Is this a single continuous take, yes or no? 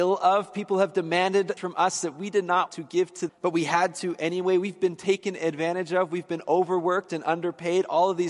no